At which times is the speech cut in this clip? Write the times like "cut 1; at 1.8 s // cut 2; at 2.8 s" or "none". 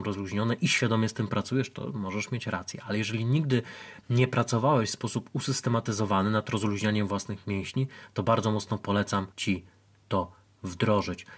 cut 1; at 9.3 s